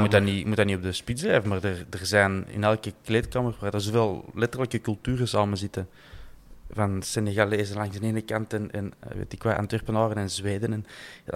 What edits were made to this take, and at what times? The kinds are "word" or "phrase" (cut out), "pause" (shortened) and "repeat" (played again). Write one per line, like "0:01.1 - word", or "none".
0:09.1 - word